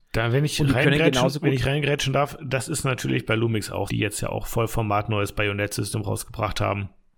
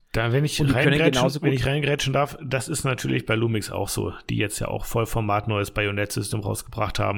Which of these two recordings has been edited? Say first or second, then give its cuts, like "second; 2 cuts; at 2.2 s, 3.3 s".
first; 1 cut; at 3.9 s